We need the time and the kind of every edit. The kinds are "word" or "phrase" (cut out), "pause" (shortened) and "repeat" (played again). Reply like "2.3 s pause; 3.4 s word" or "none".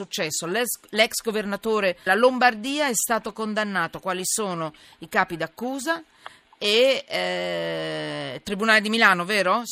2.1 s word

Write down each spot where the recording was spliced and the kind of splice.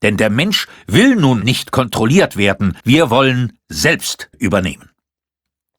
1.4 s word; 2.8 s pause; 4.3 s phrase

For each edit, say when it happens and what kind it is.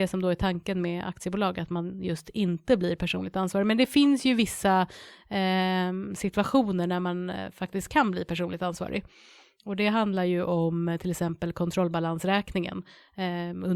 none

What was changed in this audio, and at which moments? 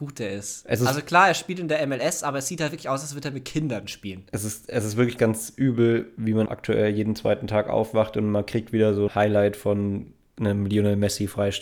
5.2 s word; 6.5 s word; 9.1 s word

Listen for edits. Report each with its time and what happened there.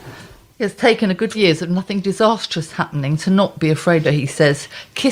1.3 s word; 4.0 s phrase

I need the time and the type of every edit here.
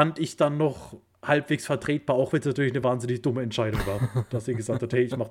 none

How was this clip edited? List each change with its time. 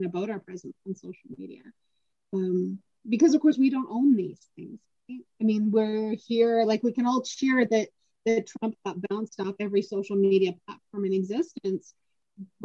none

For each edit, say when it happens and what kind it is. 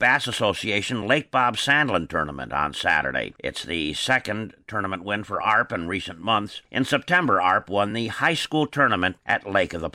none

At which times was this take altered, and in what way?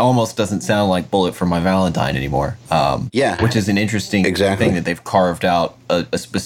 2.6 s pause

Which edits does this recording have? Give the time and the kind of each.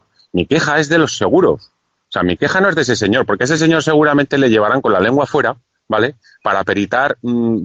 none

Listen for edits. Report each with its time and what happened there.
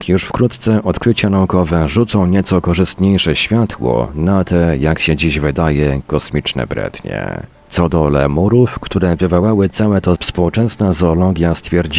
10.2 s word

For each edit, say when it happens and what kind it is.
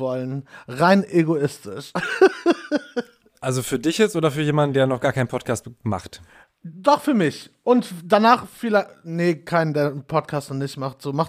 none

